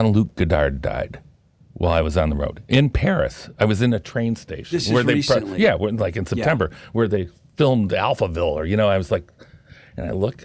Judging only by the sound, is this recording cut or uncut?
uncut